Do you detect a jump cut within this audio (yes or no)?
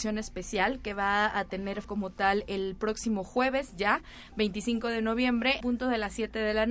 yes